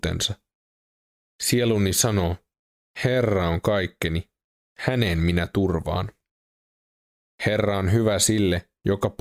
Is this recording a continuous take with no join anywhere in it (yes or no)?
yes